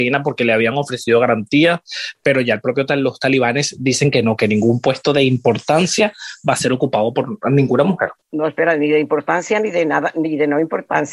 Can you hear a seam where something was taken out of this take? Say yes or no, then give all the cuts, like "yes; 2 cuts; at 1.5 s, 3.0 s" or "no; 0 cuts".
yes; 1 cut; at 8.2 s